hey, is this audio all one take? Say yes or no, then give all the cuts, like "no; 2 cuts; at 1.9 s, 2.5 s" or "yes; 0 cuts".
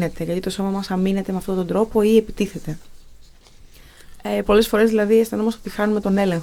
yes; 0 cuts